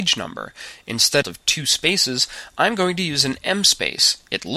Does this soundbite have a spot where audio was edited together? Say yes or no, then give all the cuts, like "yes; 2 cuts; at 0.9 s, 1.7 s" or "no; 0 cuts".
yes; 1 cut; at 1.2 s